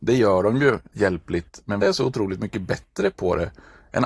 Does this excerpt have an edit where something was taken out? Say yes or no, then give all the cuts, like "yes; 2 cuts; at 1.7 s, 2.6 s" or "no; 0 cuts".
yes; 2 cuts; at 0.9 s, 1.8 s